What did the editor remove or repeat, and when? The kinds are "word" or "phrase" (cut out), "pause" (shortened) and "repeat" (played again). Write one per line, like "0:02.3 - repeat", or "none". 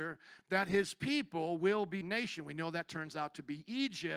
0:02.0 - phrase